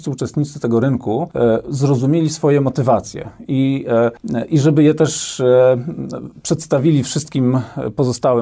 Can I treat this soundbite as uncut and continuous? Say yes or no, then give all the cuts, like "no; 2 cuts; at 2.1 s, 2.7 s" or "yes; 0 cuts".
yes; 0 cuts